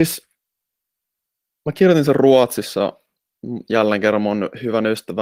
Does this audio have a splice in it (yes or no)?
no